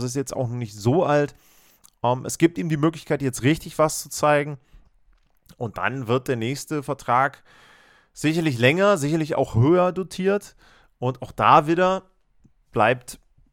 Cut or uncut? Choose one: uncut